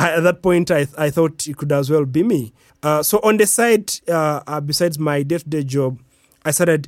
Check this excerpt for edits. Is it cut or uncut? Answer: uncut